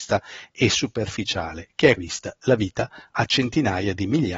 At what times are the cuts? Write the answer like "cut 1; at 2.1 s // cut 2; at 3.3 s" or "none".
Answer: cut 1; at 2.0 s